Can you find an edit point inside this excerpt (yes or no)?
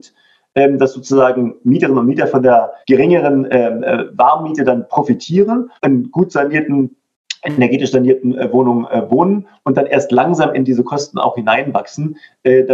yes